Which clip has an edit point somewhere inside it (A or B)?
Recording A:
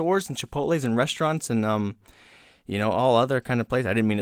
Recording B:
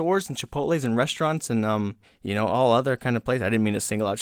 B